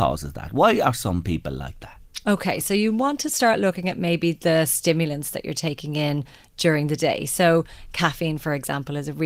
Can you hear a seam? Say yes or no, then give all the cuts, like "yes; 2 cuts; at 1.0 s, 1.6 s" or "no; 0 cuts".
no; 0 cuts